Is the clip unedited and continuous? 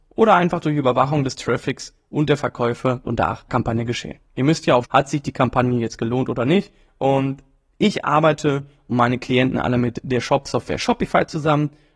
no; 3 cuts; at 3.0 s, 3.5 s, 4.8 s

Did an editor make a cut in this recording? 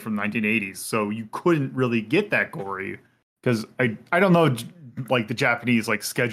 yes; 1 cut; at 4.1 s

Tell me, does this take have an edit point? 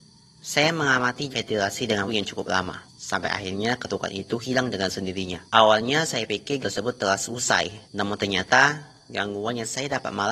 yes; 6 cuts; at 1.3 s, 2.1 s, 2.9 s, 5.5 s, 6.6 s, 7.9 s

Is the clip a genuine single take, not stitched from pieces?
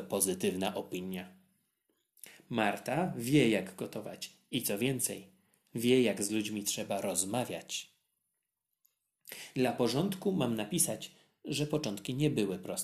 yes; 0 cuts

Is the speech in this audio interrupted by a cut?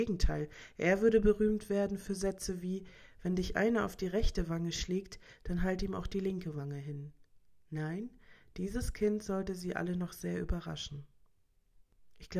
no; 0 cuts

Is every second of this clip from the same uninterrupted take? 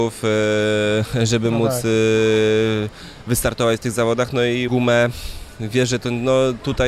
no; 1 cut; at 4.7 s

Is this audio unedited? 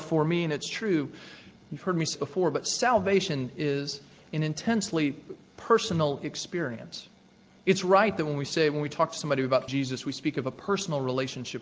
no; 2 cuts; at 2.1 s, 9.7 s

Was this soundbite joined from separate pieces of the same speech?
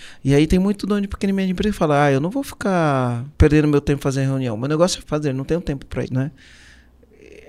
yes; 3 cuts; at 3.3 s, 5.0 s, 6.1 s

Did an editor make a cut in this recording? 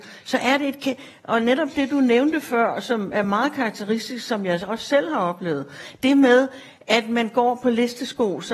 no; 0 cuts

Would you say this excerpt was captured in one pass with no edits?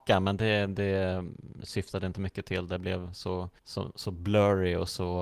no; 1 cut; at 3.6 s

